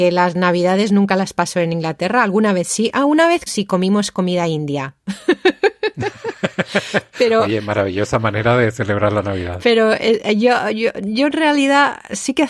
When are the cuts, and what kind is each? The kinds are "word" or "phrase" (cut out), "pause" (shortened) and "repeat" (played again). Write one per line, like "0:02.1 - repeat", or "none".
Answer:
0:03.5 - phrase